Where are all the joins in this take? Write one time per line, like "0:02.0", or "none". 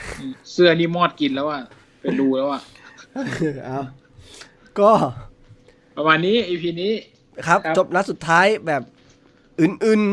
none